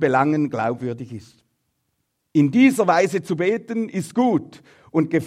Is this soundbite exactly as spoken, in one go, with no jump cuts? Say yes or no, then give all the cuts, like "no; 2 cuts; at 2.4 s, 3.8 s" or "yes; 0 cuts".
yes; 0 cuts